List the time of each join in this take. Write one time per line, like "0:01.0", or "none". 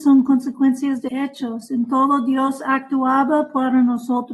0:01.1